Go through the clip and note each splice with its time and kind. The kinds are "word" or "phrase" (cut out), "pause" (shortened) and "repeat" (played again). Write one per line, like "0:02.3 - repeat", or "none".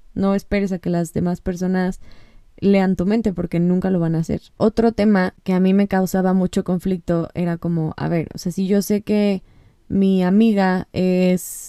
none